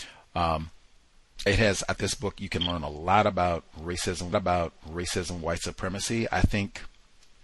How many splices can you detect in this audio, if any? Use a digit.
3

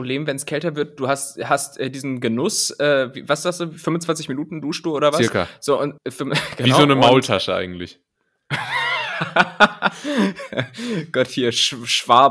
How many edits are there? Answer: 1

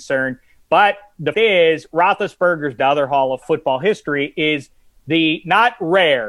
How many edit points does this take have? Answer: 3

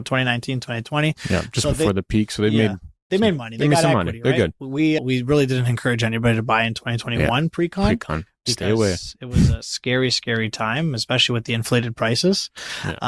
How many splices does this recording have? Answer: 1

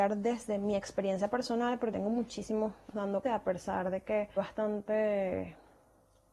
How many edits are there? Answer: 4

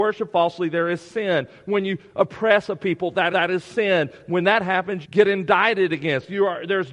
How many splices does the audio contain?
2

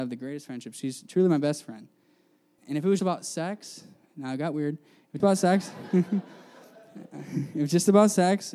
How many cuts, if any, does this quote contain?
3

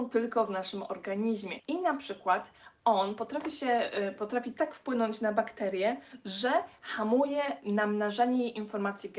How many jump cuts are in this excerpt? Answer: 0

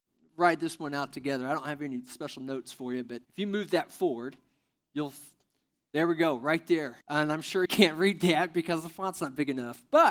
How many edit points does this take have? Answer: 3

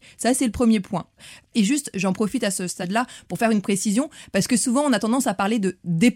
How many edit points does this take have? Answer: 0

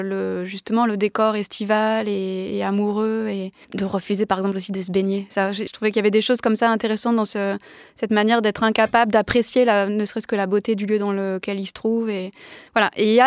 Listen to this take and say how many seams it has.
2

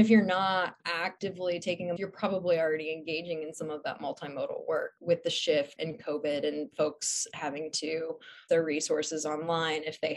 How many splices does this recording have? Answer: 4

